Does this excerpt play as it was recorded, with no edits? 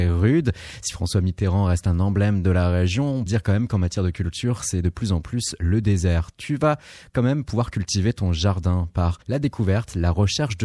no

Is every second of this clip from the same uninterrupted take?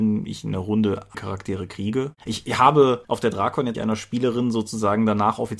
no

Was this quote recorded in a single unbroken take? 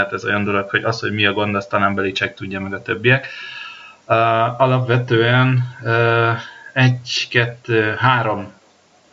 yes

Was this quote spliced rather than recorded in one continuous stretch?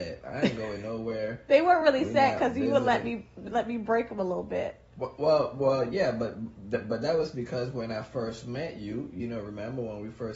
no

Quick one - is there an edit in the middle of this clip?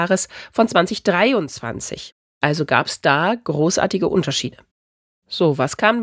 no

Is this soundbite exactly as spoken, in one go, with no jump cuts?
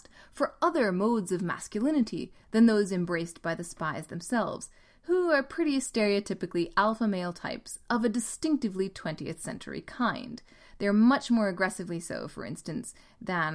yes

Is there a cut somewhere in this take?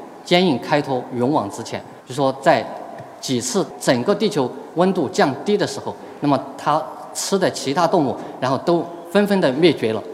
yes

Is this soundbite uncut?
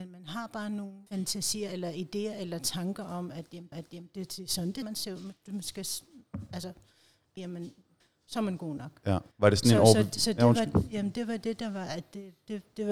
no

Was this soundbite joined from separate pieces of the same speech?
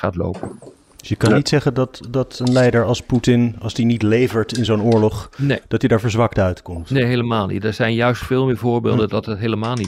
no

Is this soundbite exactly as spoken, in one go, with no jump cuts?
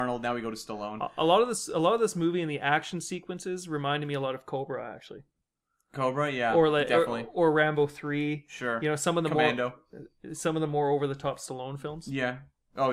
yes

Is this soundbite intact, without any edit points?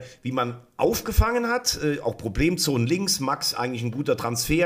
yes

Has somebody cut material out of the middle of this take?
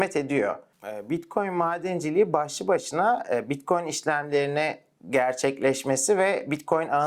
no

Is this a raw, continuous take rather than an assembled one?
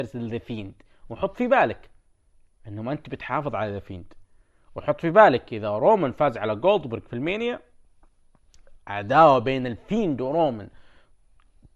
yes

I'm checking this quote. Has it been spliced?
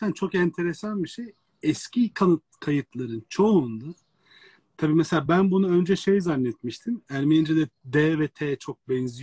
no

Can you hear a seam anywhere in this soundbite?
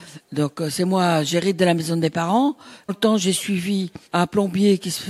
yes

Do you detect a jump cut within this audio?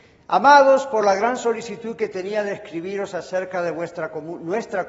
no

